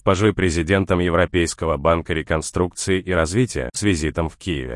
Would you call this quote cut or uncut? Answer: cut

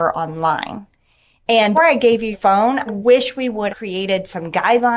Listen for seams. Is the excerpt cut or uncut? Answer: cut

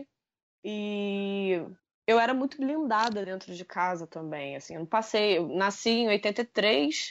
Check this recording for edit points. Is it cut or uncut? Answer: cut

